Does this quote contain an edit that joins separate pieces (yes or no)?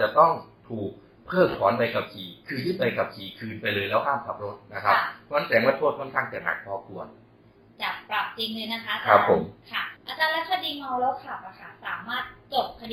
yes